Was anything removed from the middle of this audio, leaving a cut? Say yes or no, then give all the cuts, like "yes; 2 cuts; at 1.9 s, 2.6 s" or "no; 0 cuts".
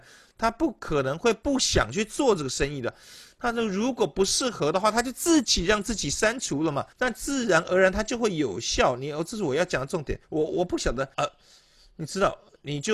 yes; 3 cuts; at 6.9 s, 10.2 s, 11.1 s